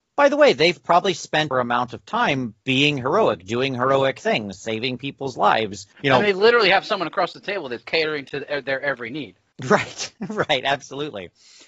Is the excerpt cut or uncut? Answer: cut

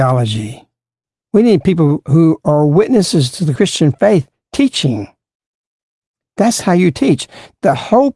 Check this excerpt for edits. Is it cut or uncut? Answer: uncut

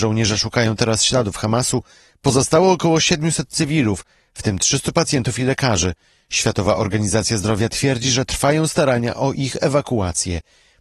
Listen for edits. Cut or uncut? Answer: uncut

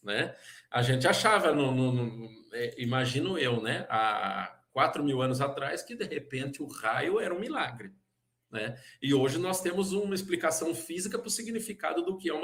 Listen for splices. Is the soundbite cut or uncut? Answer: uncut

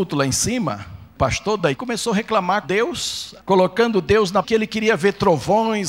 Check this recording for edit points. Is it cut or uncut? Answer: cut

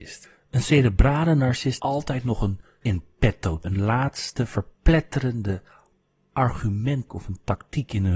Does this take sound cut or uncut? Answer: cut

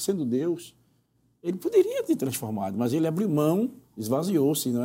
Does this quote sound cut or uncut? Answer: uncut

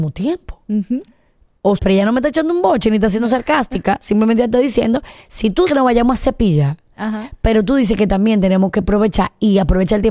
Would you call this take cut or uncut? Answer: cut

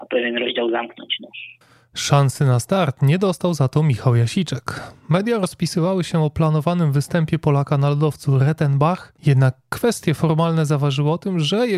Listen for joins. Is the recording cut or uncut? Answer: cut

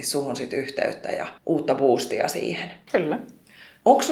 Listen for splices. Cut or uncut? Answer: cut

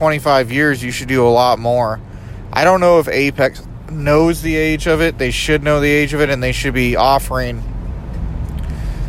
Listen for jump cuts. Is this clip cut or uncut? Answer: uncut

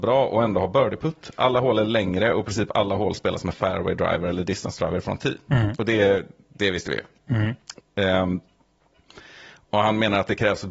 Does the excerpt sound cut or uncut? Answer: uncut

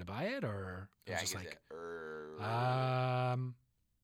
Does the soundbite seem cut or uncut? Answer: cut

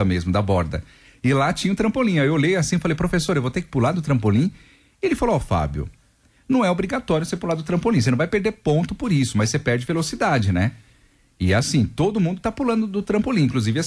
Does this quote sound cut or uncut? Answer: uncut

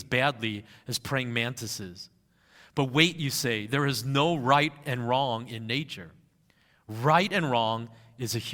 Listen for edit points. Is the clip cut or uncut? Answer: uncut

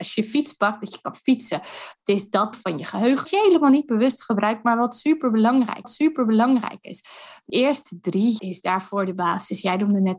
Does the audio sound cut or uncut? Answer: cut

